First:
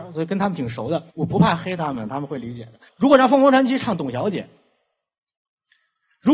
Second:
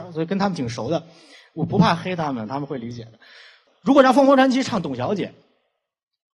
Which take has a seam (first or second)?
first